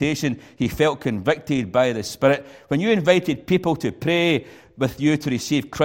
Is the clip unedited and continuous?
yes; 0 cuts

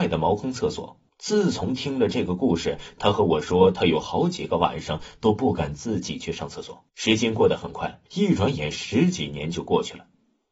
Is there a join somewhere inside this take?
yes; 3 cuts; at 1.1 s, 6.9 s, 8.1 s

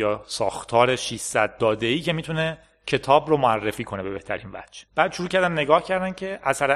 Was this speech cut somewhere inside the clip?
yes; 1 cut; at 4.9 s

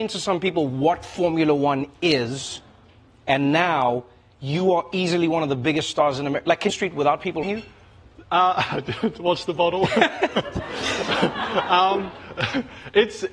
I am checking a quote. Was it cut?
yes; 2 cuts; at 6.7 s, 7.4 s

